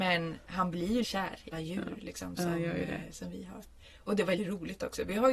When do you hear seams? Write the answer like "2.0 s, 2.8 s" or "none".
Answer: 1.0 s, 1.5 s, 4.4 s